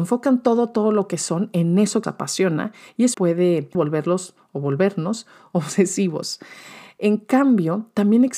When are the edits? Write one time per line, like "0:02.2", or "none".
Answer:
0:02.0
0:03.1
0:03.7